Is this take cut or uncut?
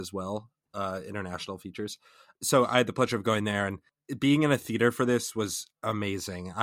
uncut